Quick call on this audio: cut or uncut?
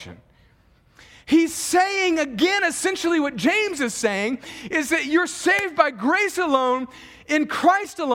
uncut